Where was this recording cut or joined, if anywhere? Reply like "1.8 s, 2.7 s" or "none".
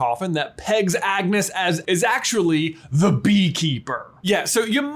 1.8 s